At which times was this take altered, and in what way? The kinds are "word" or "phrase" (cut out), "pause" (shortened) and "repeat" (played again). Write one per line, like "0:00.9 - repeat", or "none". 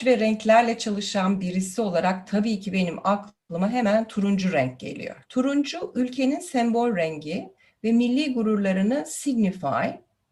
0:05.2 - pause